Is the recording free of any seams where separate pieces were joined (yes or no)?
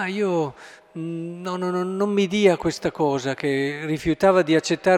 yes